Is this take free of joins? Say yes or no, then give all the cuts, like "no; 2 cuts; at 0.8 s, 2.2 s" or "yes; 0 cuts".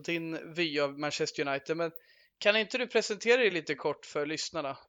yes; 0 cuts